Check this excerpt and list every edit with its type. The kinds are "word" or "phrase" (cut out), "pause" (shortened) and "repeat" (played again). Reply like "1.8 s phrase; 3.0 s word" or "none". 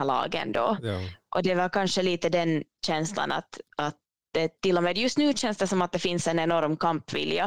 3.7 s pause